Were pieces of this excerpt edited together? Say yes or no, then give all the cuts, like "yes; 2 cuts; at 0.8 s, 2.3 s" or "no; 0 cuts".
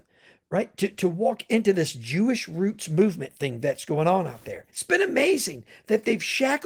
yes; 1 cut; at 4.7 s